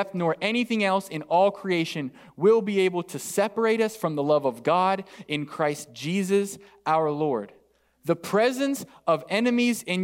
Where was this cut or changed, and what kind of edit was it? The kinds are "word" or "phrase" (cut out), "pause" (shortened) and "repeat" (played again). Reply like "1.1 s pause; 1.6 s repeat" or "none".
none